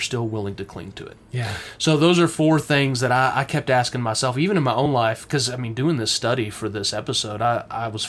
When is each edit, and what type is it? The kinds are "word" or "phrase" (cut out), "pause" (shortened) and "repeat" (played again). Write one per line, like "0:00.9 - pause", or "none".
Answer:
none